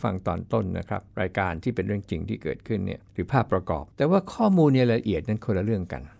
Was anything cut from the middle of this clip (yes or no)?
yes